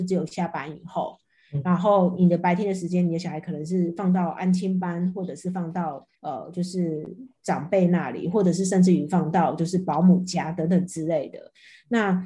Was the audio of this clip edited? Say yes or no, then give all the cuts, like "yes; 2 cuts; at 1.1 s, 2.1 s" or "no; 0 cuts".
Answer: yes; 1 cut; at 6.1 s